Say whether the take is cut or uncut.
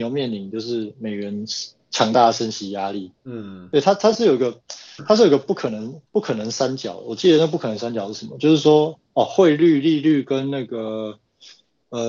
cut